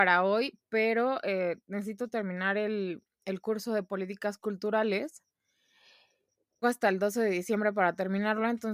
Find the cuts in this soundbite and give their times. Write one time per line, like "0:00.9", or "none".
0:06.6